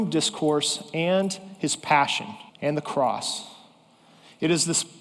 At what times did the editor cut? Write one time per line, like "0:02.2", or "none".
0:02.5